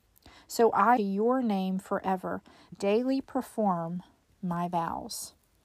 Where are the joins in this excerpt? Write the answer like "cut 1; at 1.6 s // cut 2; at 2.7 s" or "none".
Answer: cut 1; at 1.0 s // cut 2; at 2.7 s